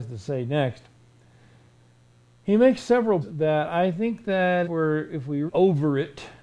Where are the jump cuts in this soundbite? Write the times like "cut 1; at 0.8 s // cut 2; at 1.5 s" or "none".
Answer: cut 1; at 3.2 s // cut 2; at 4.6 s // cut 3; at 5.5 s